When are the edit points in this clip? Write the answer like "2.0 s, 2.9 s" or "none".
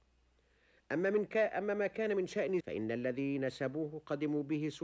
2.6 s